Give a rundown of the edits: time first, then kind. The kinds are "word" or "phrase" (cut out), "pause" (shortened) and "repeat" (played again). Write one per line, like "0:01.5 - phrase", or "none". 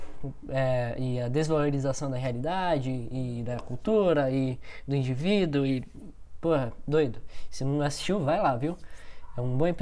none

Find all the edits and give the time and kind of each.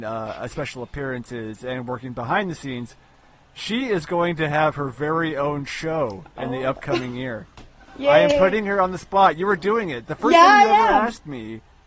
none

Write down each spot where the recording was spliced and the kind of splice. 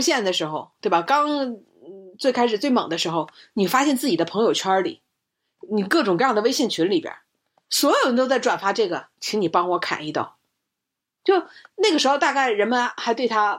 none

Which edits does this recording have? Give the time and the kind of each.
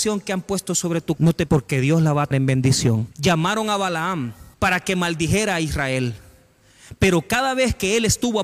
0:01.2 - word
0:01.5 - word
0:02.3 - word
0:03.1 - pause
0:04.5 - pause

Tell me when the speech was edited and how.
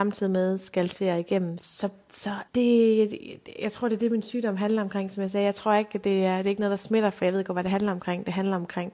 0:01.6 - phrase
0:02.5 - pause

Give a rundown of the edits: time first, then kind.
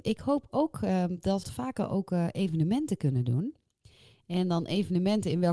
0:01.4 - phrase

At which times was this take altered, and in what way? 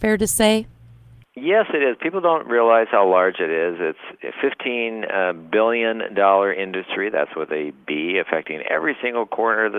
none

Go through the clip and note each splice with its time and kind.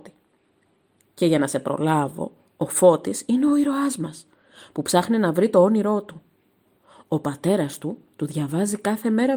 none

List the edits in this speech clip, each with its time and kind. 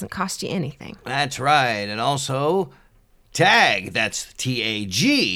none

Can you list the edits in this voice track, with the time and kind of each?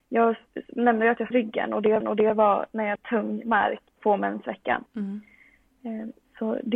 0:01.3 - word
0:02.0 - repeat
0:03.0 - word
0:03.9 - pause
0:04.9 - pause

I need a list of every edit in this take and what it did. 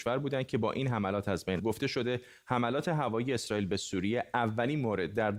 0:01.6 - word

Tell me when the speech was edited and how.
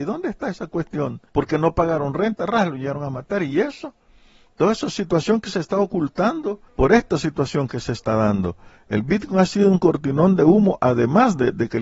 0:01.3 - pause
0:06.7 - pause

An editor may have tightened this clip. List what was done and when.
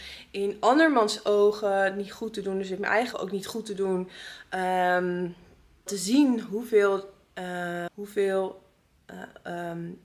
0:03.1 - word
0:05.9 - word
0:07.9 - word

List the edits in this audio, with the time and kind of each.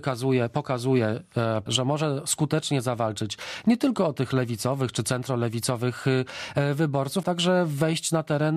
0:01.7 - word
0:07.2 - word

